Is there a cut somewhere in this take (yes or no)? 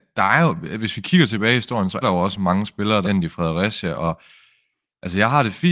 yes